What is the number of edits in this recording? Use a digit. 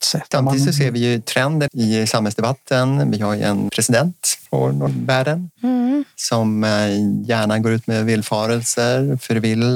3